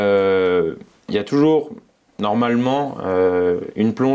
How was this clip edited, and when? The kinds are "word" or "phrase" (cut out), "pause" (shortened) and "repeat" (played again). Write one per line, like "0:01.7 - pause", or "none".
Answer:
none